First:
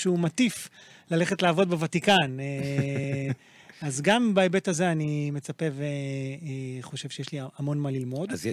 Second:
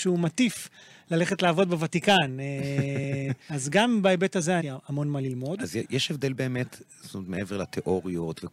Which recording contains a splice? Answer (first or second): second